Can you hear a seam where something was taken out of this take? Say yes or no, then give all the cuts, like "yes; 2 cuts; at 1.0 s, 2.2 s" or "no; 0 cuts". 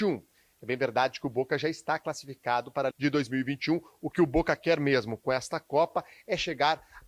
yes; 1 cut; at 2.9 s